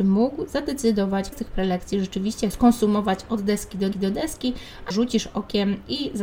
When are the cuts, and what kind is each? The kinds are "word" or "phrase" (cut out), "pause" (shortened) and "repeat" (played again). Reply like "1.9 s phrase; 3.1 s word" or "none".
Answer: 1.3 s word; 2.5 s word; 3.9 s repeat; 4.9 s phrase